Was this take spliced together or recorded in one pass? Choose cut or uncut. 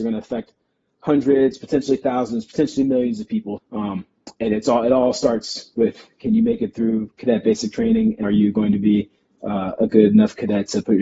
cut